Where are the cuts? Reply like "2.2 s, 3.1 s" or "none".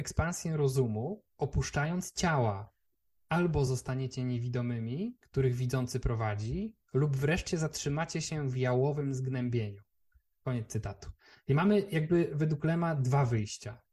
none